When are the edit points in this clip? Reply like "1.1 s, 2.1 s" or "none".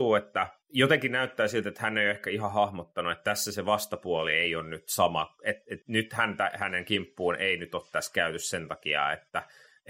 5.8 s